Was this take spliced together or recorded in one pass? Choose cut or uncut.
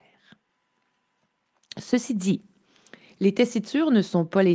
uncut